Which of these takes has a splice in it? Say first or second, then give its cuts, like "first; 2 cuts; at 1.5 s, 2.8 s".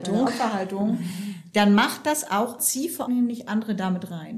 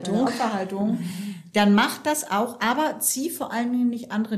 first; 2 cuts; at 2.6 s, 3.1 s